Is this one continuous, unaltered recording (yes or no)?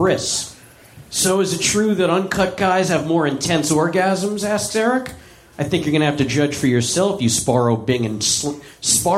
yes